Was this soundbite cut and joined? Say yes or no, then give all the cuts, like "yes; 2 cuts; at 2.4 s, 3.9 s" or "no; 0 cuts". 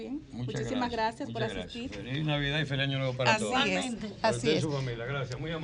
no; 0 cuts